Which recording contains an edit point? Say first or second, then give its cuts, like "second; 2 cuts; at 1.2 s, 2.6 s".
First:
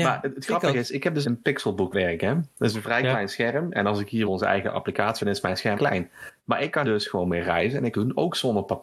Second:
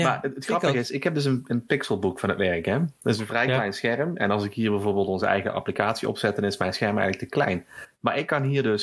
first; 7 cuts; at 1.2 s, 1.9 s, 4.2 s, 5.2 s, 5.7 s, 6.8 s, 7.9 s